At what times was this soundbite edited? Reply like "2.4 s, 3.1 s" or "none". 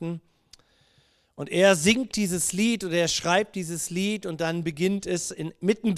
none